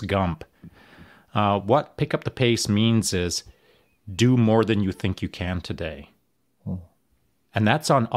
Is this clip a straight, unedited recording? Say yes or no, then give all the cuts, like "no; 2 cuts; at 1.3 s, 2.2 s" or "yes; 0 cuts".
yes; 0 cuts